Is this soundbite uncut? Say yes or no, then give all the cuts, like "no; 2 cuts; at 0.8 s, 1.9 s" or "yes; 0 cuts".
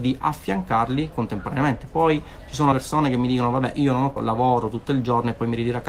no; 2 cuts; at 2.7 s, 4.2 s